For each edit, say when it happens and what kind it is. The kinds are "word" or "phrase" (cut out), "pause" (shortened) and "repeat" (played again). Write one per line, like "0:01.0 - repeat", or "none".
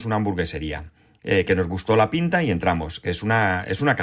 none